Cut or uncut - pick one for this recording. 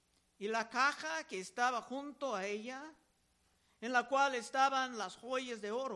uncut